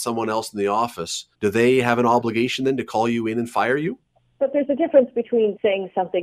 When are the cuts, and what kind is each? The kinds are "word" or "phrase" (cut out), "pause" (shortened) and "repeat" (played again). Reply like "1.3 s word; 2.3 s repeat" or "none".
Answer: 1.3 s pause